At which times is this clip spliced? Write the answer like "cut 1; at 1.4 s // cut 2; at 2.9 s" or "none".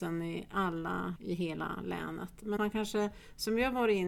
cut 1; at 1.2 s // cut 2; at 2.6 s

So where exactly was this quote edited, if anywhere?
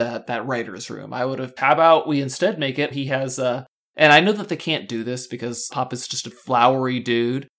cut 1; at 1.6 s // cut 2; at 2.9 s // cut 3; at 5.7 s // cut 4; at 6.3 s

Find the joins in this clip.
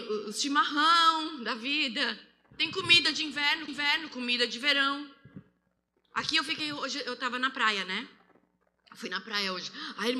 cut 1; at 3.7 s

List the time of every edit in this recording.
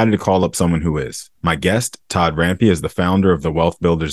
cut 1; at 1.4 s // cut 2; at 2.0 s

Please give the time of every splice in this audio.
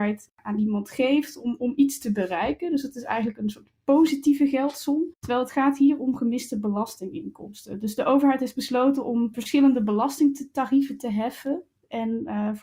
cut 1; at 5.2 s

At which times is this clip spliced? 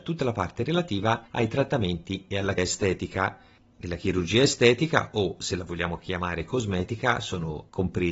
cut 1; at 1.3 s // cut 2; at 2.6 s

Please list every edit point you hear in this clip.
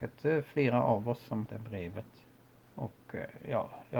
cut 1; at 1.5 s

